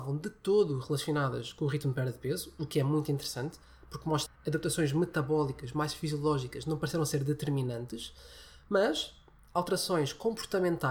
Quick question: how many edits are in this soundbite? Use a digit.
1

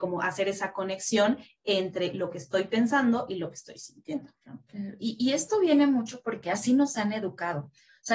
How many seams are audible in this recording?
0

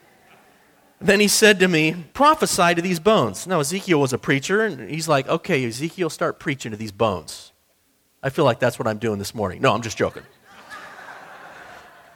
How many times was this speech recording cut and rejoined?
1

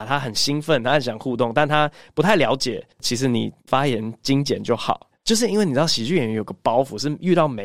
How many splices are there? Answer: 2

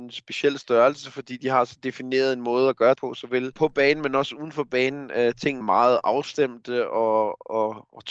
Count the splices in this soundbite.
2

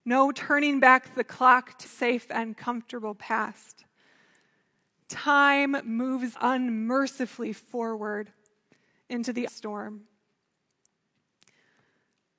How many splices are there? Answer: 3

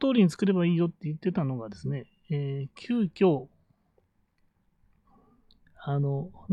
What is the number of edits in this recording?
0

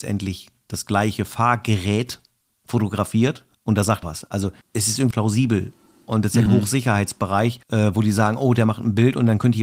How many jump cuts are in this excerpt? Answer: 6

